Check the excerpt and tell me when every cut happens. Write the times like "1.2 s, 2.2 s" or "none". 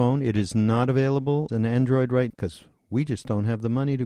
1.5 s, 2.3 s